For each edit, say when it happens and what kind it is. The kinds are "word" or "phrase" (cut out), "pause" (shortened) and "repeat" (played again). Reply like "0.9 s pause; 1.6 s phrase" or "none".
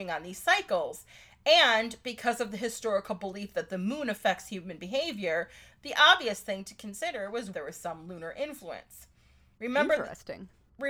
7.5 s phrase